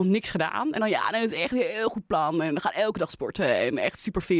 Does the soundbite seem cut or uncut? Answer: uncut